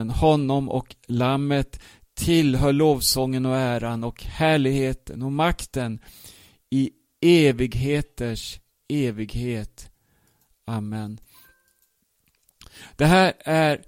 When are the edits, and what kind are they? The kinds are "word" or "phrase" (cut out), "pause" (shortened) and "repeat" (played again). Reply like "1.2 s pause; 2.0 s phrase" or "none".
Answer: none